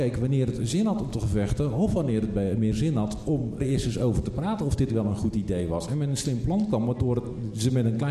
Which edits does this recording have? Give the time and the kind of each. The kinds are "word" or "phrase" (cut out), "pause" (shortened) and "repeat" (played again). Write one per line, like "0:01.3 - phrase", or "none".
0:03.6 - word

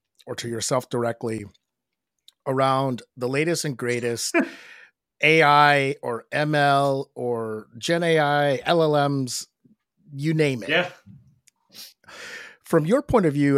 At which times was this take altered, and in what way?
none

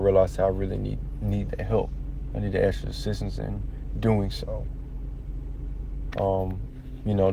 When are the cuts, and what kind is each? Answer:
0:06.1 - word

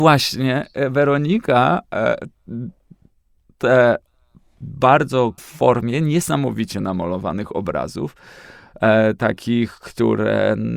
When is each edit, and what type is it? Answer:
0:05.4 - phrase

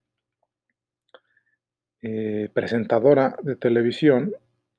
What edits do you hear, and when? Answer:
none

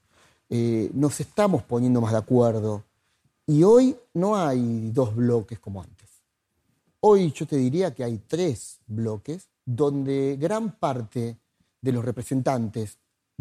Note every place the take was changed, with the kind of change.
0:09.6 - pause

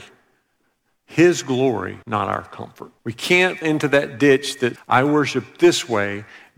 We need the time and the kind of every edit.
0:02.0 - pause
0:03.0 - pause
0:03.6 - word
0:04.8 - word

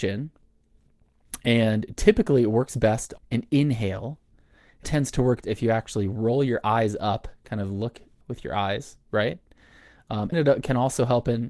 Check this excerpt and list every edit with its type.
0:03.2 - word
0:04.8 - word
0:05.4 - word
0:08.2 - word
0:10.3 - word

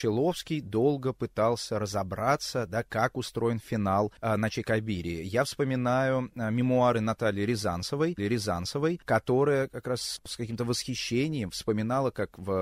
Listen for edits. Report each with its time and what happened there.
0:08.2 - repeat

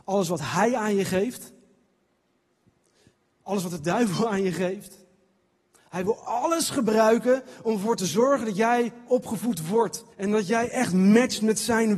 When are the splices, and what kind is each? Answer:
0:10.1 - pause

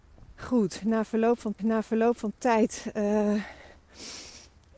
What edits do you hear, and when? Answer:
0:01.6 - repeat

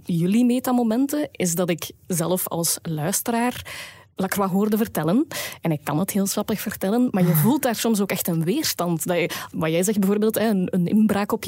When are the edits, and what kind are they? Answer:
none

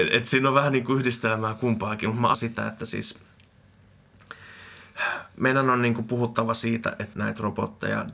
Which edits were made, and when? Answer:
0:02.3 - word
0:07.1 - word

